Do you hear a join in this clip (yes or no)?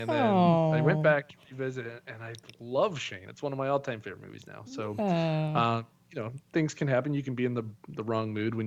no